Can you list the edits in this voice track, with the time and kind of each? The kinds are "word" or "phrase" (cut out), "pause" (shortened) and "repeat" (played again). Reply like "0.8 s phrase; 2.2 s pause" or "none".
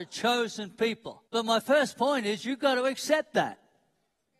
1.3 s pause